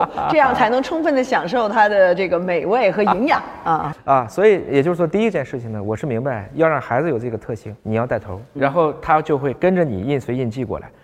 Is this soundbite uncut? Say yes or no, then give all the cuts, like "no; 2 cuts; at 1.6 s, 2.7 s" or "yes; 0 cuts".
no; 2 cuts; at 7.8 s, 8.6 s